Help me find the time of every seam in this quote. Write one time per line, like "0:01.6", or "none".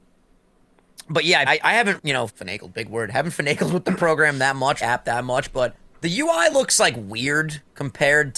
0:01.5
0:02.0
0:02.3
0:04.8
0:05.8